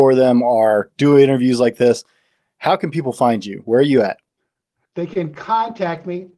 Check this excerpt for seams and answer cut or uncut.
uncut